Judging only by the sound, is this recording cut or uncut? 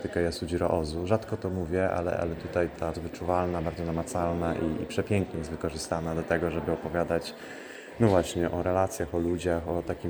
cut